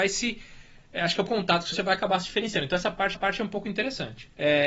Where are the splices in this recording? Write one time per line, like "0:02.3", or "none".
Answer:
0:01.3
0:01.7
0:03.1